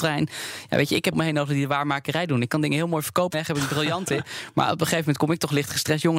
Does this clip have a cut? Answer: yes; 2 cuts; at 1.1 s, 3.3 s

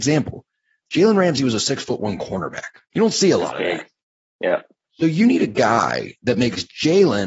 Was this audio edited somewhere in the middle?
yes; 1 cut; at 2.8 s

